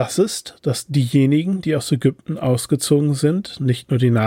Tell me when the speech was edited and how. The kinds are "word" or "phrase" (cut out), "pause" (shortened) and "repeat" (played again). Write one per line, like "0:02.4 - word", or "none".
none